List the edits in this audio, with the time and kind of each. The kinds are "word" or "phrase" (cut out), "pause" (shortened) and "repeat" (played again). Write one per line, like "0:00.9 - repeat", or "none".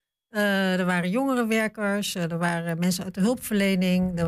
none

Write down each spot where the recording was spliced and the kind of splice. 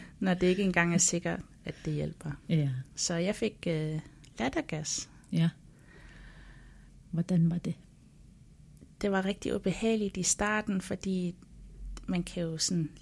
0:06.9 - pause

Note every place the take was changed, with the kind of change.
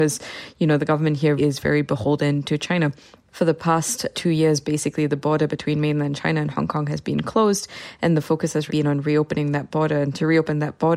0:01.4 - word
0:08.7 - word

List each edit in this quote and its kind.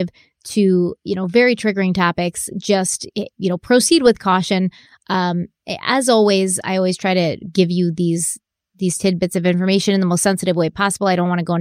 none

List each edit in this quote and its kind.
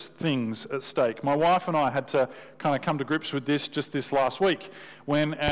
none

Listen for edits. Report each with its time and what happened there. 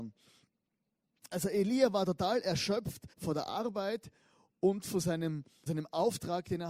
0:03.1 - pause
0:05.7 - word

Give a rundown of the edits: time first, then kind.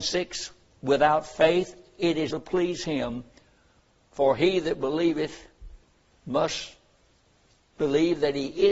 0:02.3 - word

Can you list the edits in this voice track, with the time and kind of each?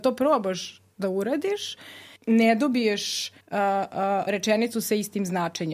0:02.2 - pause
0:03.4 - pause
0:04.3 - word

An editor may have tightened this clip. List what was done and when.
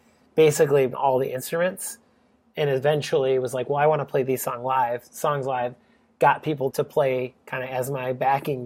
0:00.9 - word
0:06.7 - word

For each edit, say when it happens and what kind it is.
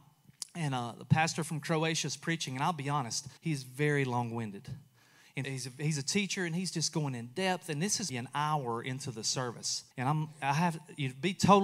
0:03.4 - pause
0:05.4 - word
0:08.1 - word
0:09.9 - pause

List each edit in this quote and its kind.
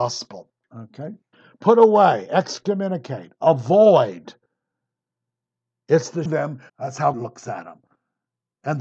0:01.3 - pause
0:06.3 - word
0:06.7 - pause
0:07.1 - word

